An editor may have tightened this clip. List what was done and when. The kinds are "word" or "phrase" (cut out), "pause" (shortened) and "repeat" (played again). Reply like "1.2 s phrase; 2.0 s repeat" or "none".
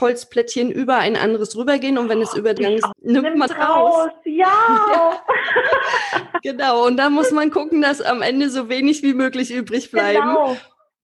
2.6 s phrase; 2.9 s word; 3.5 s word